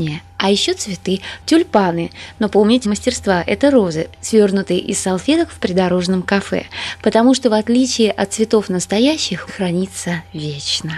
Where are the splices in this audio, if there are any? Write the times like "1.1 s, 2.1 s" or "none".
2.8 s, 9.5 s